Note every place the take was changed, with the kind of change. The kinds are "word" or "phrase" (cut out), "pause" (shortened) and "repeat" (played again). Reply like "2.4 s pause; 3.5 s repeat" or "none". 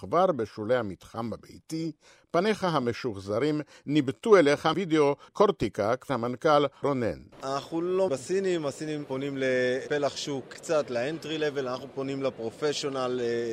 4.7 s word; 5.3 s word; 6.1 s word; 6.8 s word; 8.1 s word; 10.5 s word